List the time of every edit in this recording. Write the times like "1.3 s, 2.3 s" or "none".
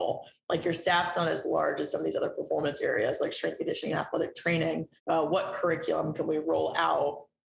5.0 s